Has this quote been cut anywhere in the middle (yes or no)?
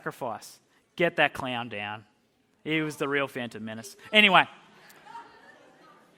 no